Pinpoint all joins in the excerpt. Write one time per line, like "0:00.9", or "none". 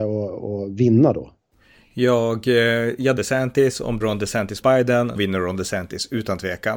0:03.2
0:04.0
0:04.6
0:05.2